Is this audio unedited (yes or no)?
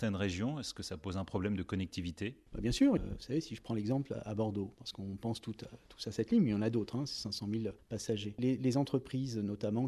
yes